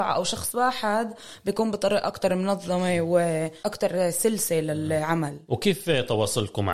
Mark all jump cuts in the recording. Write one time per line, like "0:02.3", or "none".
none

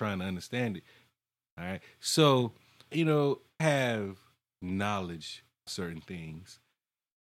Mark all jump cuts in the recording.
0:02.9
0:03.6
0:05.7

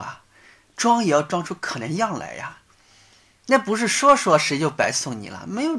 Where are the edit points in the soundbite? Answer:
none

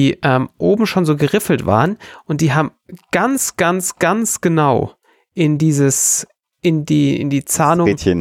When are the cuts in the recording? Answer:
0:06.5

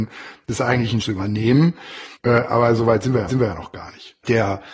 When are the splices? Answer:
0:01.0
0:02.1
0:03.3

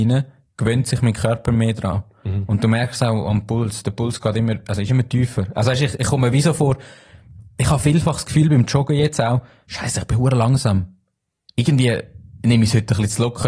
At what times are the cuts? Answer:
none

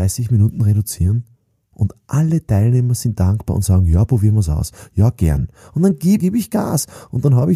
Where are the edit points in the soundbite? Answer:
0:06.2

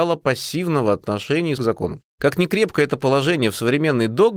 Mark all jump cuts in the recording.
0:01.6
0:02.1

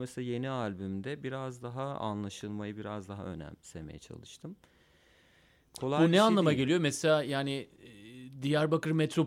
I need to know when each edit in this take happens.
none

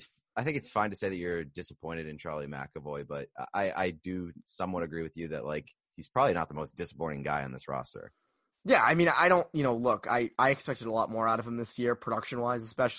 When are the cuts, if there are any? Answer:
none

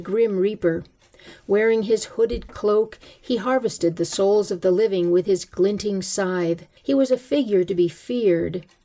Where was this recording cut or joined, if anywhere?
0:06.8

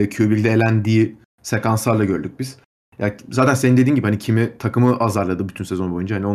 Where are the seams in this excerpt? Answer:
none

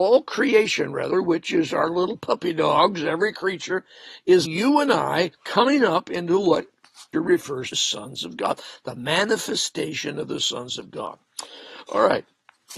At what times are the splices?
0:04.4
0:05.3
0:07.1
0:07.7

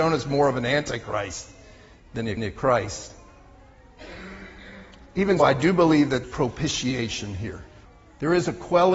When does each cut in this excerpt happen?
0:02.4
0:05.4
0:06.2
0:07.9

